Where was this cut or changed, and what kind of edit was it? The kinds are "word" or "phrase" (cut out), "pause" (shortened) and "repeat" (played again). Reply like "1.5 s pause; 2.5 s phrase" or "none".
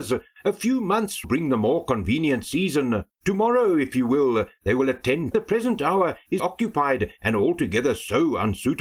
1.2 s word; 3.1 s pause; 5.3 s phrase; 6.4 s word